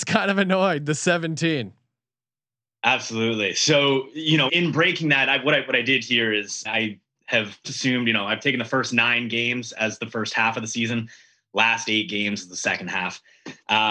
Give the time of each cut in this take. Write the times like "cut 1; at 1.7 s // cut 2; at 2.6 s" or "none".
cut 1; at 4.5 s // cut 2; at 6.6 s // cut 3; at 7.6 s